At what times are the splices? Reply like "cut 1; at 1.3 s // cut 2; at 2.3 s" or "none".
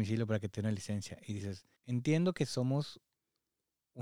cut 1; at 1.8 s